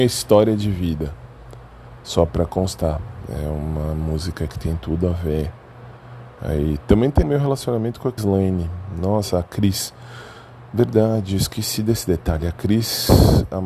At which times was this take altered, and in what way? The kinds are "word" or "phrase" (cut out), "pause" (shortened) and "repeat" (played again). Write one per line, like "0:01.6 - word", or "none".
0:07.2 - phrase
0:08.2 - word